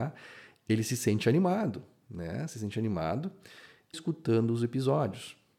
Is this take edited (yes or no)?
yes